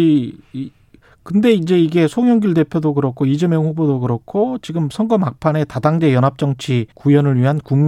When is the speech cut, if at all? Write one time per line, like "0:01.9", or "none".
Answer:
0:06.9